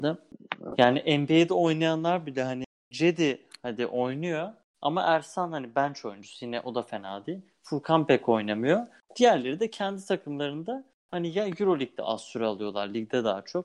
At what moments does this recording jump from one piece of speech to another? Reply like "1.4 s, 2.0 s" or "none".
none